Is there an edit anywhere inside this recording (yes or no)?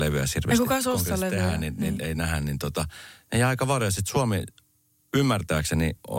no